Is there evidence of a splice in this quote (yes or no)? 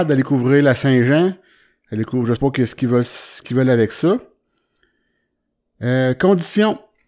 yes